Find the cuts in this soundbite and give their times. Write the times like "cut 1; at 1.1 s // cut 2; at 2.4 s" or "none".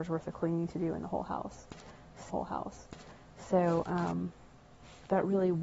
cut 1; at 2.3 s